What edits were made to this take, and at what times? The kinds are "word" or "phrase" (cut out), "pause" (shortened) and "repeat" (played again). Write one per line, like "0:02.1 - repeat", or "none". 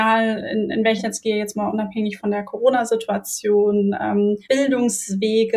0:01.0 - word
0:02.2 - word
0:04.4 - pause